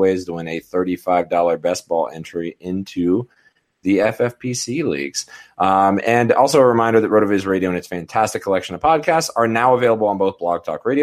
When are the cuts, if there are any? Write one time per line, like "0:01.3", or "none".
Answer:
none

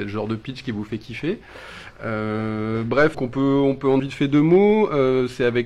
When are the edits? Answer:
0:03.1
0:04.0

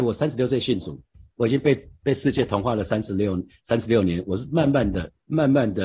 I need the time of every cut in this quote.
none

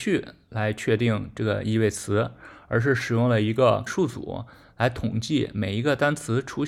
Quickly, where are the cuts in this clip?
0:03.9

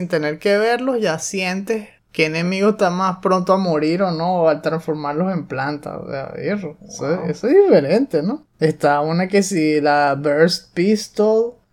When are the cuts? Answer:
0:08.5

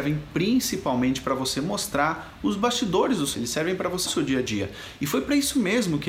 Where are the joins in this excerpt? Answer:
0:03.3
0:04.1

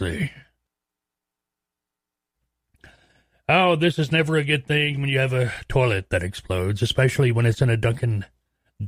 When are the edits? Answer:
none

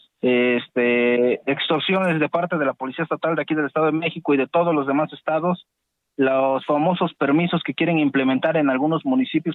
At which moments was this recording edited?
none

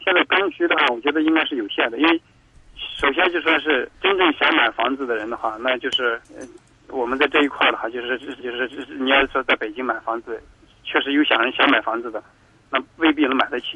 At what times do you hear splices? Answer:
0:03.9
0:06.2
0:08.4

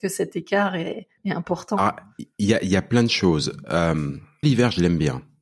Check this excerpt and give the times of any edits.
0:01.2
0:04.4

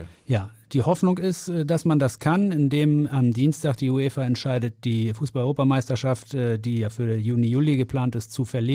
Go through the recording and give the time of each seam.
0:03.1

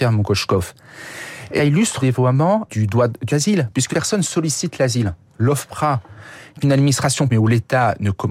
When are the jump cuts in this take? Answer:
0:01.6
0:02.0
0:02.7
0:03.3
0:03.9
0:06.6
0:07.3

